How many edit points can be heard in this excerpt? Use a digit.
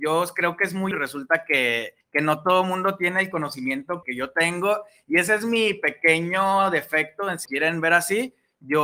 4